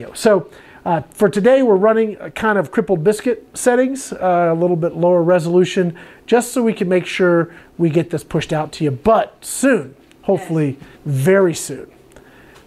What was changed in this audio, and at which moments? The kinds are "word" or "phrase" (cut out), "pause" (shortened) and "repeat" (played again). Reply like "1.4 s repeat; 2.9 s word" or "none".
10.9 s pause